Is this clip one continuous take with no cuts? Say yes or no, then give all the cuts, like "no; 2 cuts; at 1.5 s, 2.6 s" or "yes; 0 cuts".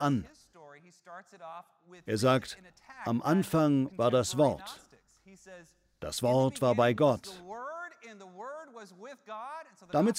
yes; 0 cuts